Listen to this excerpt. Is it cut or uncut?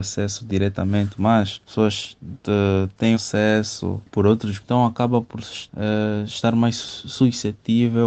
cut